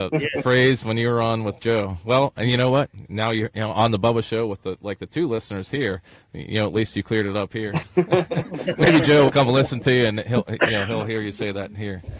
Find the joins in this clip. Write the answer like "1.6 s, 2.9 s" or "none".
none